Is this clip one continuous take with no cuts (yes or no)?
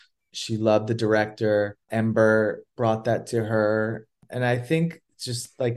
no